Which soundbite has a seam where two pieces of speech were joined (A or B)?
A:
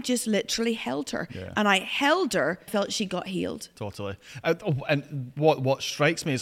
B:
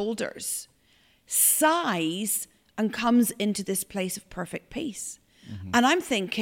A